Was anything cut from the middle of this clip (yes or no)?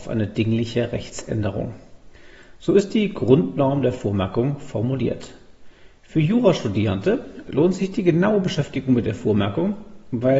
no